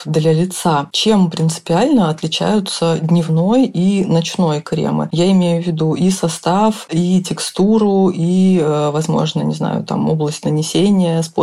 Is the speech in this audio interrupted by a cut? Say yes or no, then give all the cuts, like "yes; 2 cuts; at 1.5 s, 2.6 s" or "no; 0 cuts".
no; 0 cuts